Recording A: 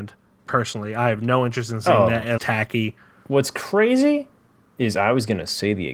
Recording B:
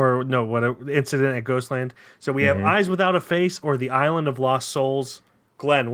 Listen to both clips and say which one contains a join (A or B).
A